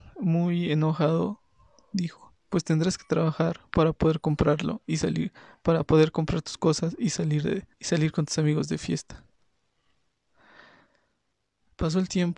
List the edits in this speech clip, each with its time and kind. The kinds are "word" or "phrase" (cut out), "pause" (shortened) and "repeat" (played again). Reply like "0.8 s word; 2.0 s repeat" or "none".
7.7 s pause